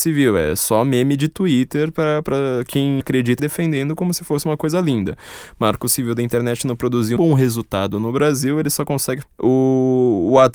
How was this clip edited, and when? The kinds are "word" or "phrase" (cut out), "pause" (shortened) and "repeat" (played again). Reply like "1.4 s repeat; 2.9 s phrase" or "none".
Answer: 3.0 s word; 3.4 s phrase; 7.2 s word; 9.2 s word